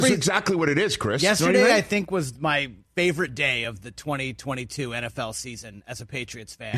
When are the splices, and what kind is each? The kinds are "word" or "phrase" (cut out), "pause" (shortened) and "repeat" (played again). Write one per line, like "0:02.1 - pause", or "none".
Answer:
none